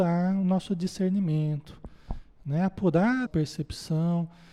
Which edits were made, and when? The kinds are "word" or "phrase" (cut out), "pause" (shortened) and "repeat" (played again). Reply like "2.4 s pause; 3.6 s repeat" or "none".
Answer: 3.3 s phrase